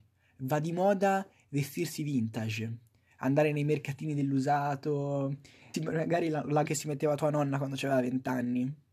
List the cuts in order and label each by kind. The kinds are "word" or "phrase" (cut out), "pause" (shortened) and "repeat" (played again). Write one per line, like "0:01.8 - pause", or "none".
0:05.7 - word
0:06.7 - word